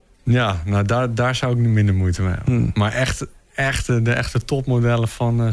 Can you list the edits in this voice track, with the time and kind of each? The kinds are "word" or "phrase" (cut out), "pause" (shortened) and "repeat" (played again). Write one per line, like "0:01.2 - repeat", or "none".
none